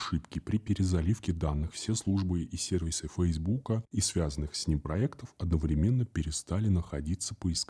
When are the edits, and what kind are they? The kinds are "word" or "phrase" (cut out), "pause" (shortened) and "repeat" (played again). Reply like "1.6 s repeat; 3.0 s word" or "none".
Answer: 3.9 s pause